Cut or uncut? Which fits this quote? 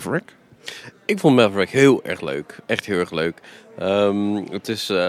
uncut